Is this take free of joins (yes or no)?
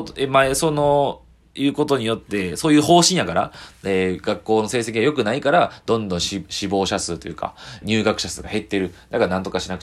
no